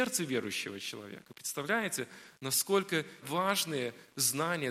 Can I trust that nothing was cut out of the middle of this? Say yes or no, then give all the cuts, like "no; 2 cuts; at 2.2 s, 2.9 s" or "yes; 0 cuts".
no; 1 cut; at 3.2 s